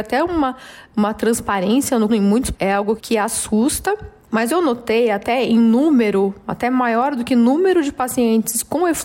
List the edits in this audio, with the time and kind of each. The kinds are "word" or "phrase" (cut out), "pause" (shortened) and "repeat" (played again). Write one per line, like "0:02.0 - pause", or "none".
0:02.1 - phrase
0:02.5 - phrase
0:03.0 - word
0:04.5 - phrase